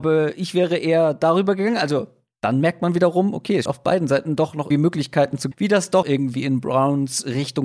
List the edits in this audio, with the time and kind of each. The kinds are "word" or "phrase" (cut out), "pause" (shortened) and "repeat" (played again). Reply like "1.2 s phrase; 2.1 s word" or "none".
3.7 s word; 4.7 s word; 5.5 s word; 6.0 s word